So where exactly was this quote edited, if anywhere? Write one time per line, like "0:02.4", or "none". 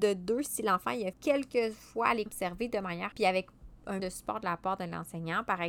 0:01.1
0:02.3
0:03.1
0:04.0